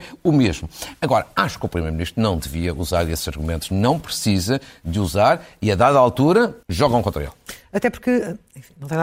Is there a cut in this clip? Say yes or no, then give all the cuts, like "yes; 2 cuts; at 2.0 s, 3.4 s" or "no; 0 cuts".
yes; 1 cut; at 6.6 s